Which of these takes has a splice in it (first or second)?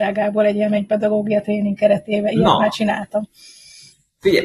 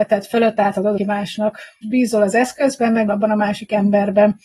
second